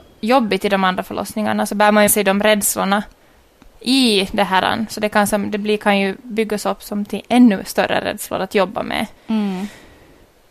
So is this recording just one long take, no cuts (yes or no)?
no